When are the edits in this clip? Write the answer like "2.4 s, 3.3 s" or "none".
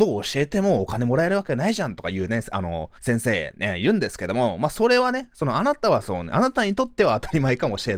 3.0 s